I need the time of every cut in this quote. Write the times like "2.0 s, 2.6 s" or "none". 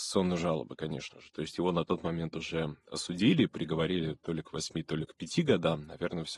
none